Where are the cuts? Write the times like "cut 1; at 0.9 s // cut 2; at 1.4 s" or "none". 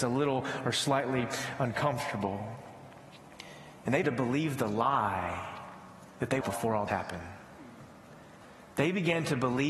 cut 1; at 4.0 s // cut 2; at 6.1 s // cut 3; at 6.4 s // cut 4; at 6.9 s